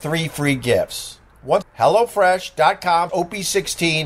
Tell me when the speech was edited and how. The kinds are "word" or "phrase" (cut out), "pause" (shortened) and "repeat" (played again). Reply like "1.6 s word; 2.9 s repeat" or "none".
1.6 s word; 3.1 s word